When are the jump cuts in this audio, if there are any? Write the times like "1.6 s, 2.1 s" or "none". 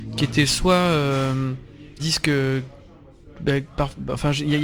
2.0 s